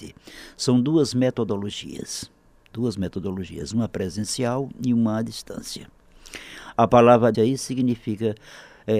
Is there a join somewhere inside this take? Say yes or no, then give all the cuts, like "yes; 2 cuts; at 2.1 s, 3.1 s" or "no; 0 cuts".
yes; 1 cut; at 7.3 s